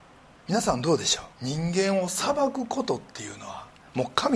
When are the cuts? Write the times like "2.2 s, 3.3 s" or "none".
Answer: 1.3 s